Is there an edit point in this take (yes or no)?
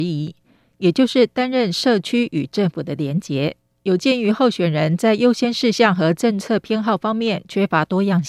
yes